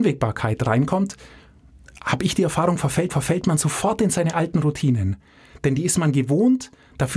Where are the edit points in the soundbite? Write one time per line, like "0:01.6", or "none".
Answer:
0:03.1